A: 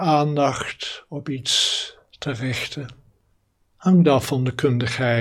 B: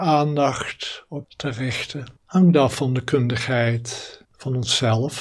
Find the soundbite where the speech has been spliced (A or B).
B